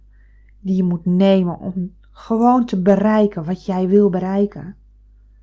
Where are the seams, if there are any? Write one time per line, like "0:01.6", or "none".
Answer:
none